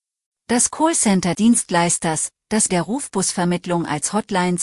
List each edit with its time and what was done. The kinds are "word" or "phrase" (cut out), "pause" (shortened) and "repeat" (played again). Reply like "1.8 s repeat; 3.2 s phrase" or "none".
1.3 s word; 2.7 s word